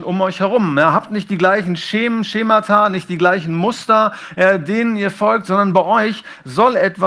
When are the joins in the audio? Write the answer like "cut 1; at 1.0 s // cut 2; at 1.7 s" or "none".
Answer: none

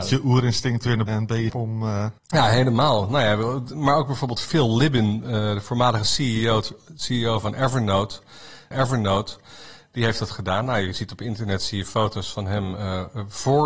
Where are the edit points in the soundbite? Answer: cut 1; at 1.1 s // cut 2; at 1.5 s // cut 3; at 2.2 s // cut 4; at 8.7 s

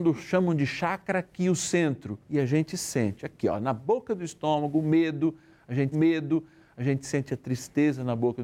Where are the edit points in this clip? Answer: cut 1; at 2.2 s // cut 2; at 5.9 s

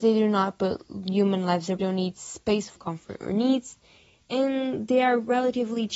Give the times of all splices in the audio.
cut 1; at 1.8 s // cut 2; at 2.8 s

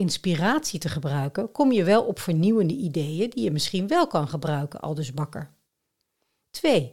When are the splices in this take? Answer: none

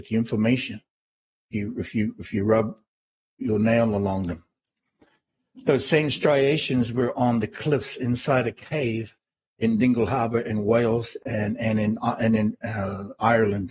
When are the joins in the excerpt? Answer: none

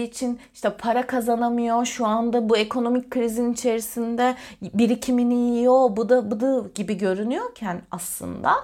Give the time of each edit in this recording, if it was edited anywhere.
none

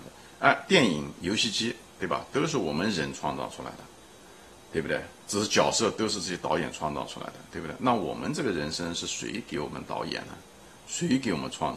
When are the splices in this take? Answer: cut 1; at 5.2 s

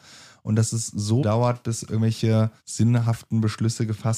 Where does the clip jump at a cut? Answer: cut 1; at 1.2 s // cut 2; at 2.6 s

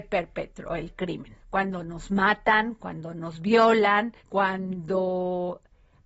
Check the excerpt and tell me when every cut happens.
cut 1; at 1.4 s // cut 2; at 4.2 s

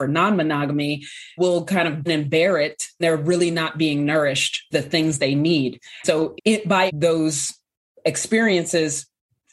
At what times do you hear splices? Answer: cut 1; at 1.4 s // cut 2; at 2.1 s // cut 3; at 3.0 s // cut 4; at 4.7 s // cut 5; at 5.2 s // cut 6; at 6.0 s // cut 7; at 6.4 s // cut 8; at 6.9 s

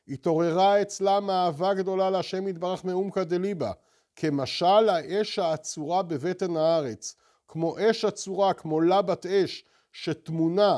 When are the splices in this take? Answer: none

